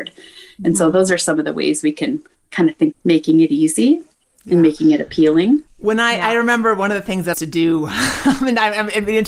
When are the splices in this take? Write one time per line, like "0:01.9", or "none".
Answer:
0:02.9
0:05.7
0:07.3